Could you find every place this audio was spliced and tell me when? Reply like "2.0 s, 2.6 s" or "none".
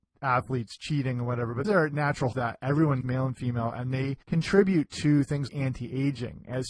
1.6 s, 2.3 s, 3.0 s, 4.2 s, 5.5 s